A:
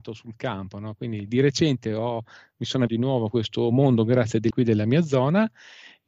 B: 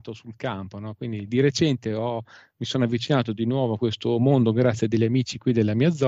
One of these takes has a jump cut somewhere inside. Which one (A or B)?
A